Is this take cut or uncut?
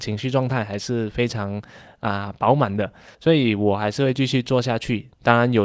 cut